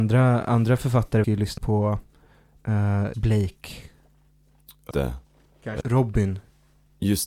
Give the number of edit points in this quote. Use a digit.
5